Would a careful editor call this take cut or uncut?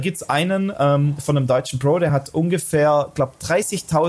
uncut